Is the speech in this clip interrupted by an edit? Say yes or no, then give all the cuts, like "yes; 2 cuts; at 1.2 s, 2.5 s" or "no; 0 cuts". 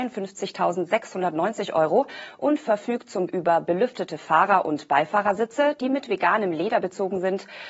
yes; 1 cut; at 3.3 s